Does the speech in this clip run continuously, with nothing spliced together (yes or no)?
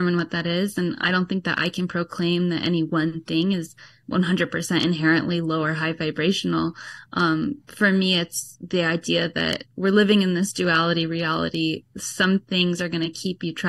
yes